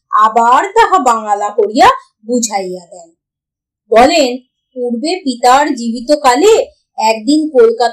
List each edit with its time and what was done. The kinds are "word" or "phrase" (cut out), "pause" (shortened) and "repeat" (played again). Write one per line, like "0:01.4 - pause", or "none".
none